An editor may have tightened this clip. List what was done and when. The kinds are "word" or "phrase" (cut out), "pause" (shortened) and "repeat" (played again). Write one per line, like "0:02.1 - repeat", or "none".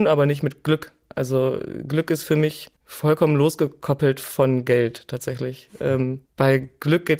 0:02.8 - pause
0:06.3 - pause